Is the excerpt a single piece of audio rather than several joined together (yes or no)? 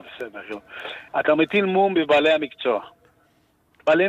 no